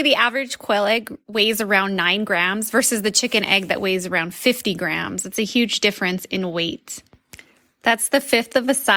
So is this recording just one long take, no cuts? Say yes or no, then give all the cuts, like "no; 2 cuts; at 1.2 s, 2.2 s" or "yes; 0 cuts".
yes; 0 cuts